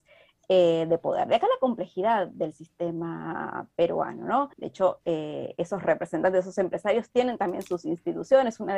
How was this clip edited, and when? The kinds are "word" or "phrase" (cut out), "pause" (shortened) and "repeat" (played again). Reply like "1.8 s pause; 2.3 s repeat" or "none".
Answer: 4.5 s pause

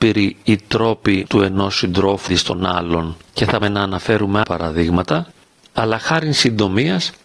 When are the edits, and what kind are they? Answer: 1.3 s word; 2.3 s word; 3.6 s word; 4.4 s word

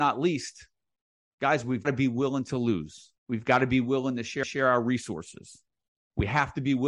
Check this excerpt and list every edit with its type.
1.8 s word; 3.2 s pause; 4.4 s repeat; 5.9 s pause

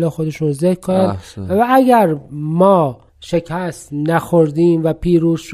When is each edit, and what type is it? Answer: 3.1 s pause

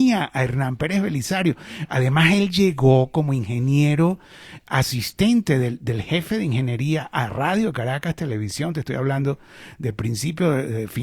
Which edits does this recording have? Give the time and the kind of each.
none

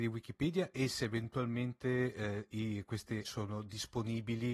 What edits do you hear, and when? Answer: 3.2 s word

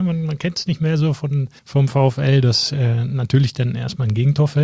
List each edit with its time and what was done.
1.6 s pause

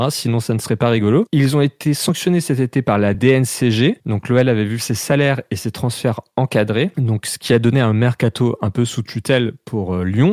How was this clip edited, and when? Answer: none

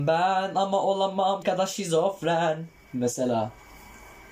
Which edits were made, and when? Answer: 1.4 s word

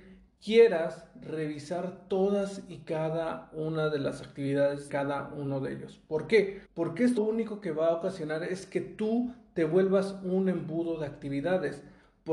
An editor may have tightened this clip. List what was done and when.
4.9 s word; 6.6 s pause; 7.2 s word

